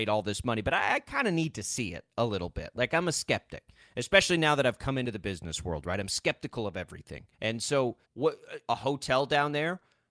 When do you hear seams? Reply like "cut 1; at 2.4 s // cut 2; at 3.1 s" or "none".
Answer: cut 1; at 7.3 s // cut 2; at 8.0 s // cut 3; at 8.7 s